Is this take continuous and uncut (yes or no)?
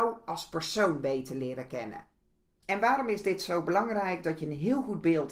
yes